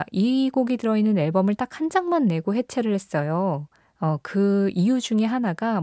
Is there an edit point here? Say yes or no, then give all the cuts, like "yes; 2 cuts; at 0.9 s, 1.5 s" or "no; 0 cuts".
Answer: yes; 1 cut; at 3.8 s